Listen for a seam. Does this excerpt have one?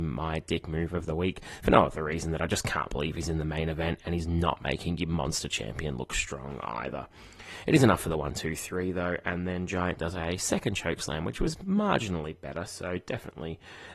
no; 0 cuts

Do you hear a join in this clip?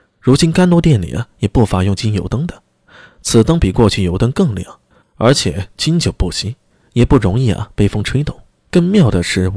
no; 0 cuts

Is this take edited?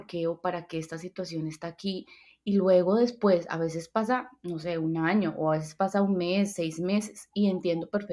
no; 0 cuts

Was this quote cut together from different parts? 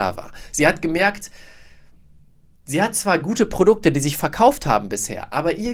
no; 0 cuts

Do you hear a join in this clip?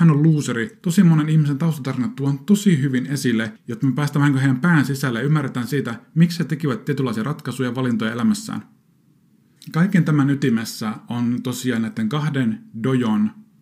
yes; 1 cut; at 9.0 s

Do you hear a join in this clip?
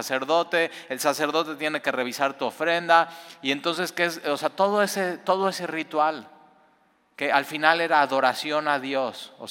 no; 0 cuts

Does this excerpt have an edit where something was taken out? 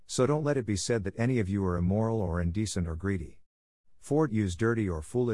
yes; 1 cut; at 4.3 s

